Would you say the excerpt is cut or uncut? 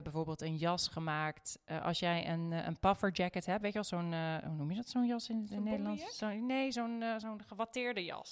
uncut